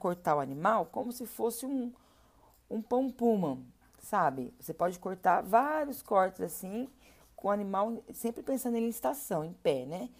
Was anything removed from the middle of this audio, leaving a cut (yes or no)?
no